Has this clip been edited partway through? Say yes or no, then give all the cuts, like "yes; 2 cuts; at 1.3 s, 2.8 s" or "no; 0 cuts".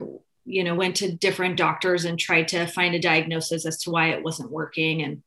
no; 0 cuts